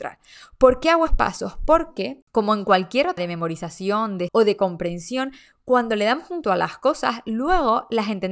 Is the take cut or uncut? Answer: cut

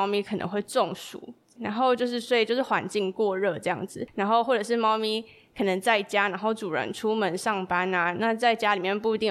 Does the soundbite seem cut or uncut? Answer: cut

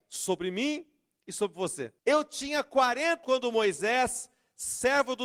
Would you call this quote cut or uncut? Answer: cut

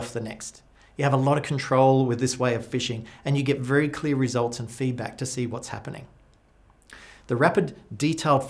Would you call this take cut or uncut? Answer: uncut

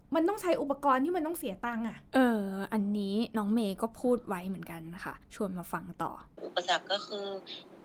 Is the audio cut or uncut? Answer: cut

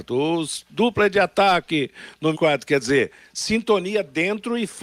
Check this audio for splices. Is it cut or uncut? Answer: cut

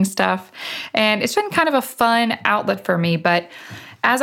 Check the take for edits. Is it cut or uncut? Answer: cut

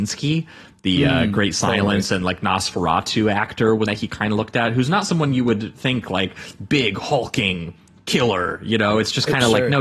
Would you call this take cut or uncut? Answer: cut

